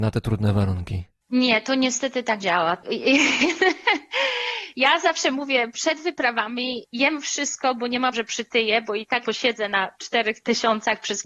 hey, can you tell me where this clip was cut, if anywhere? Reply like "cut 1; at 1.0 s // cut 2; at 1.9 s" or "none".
cut 1; at 2.4 s // cut 2; at 8.1 s // cut 3; at 9.2 s

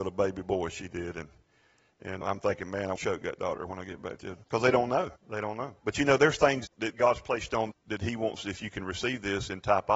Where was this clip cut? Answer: cut 1; at 2.2 s // cut 2; at 2.9 s // cut 3; at 4.4 s // cut 4; at 5.2 s // cut 5; at 5.8 s // cut 6; at 6.6 s // cut 7; at 7.7 s

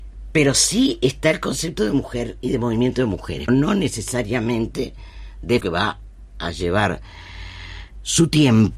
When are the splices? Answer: cut 1; at 3.5 s // cut 2; at 5.6 s

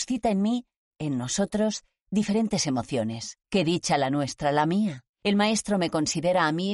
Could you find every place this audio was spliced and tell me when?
cut 1; at 3.4 s // cut 2; at 5.1 s

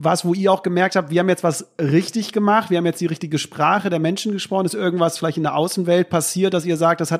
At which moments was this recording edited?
none

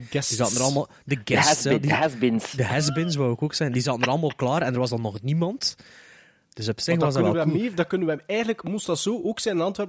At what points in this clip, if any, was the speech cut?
none

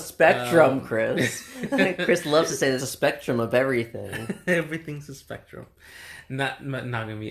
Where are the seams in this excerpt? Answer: cut 1; at 2.8 s

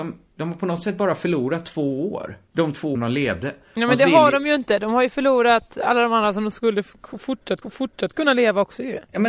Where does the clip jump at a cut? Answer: cut 1; at 2.5 s // cut 2; at 2.9 s // cut 3; at 7.6 s

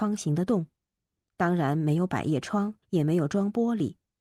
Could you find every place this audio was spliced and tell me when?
cut 1; at 2.8 s

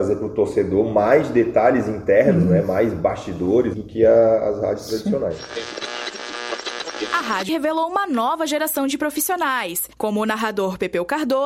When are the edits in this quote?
cut 1; at 3.7 s // cut 2; at 7.5 s // cut 3; at 9.9 s

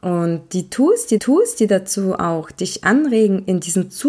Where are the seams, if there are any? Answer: cut 1; at 1.2 s

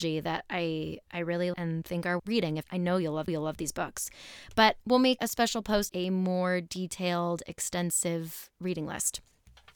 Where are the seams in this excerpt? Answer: cut 1; at 1.5 s // cut 2; at 2.2 s // cut 3; at 2.6 s // cut 4; at 3.3 s // cut 5; at 4.8 s // cut 6; at 5.2 s // cut 7; at 5.9 s

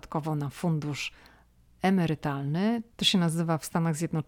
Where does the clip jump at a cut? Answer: none

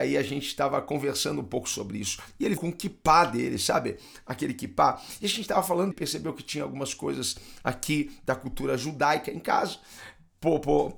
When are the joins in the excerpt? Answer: cut 1; at 2.6 s // cut 2; at 5.9 s

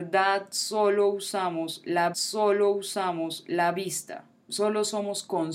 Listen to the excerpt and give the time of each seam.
cut 1; at 2.1 s

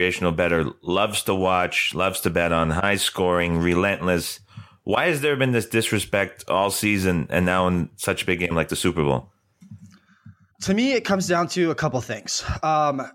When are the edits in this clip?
cut 1; at 10.5 s

